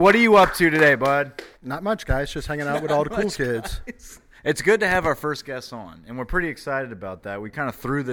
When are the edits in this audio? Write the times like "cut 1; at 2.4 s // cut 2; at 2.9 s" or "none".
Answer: cut 1; at 1.5 s // cut 2; at 4.4 s

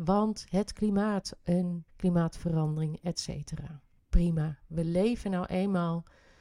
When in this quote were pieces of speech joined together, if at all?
cut 1; at 1.9 s // cut 2; at 4.0 s

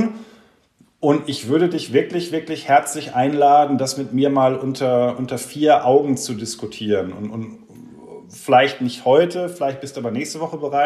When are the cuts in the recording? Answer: none

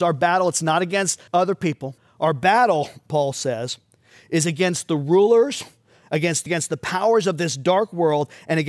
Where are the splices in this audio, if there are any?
cut 1; at 1.3 s // cut 2; at 2.0 s // cut 3; at 6.5 s

